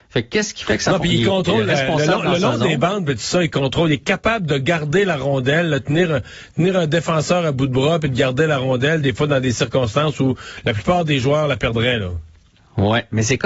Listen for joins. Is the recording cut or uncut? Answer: uncut